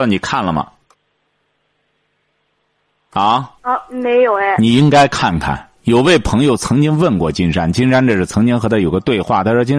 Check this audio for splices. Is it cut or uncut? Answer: cut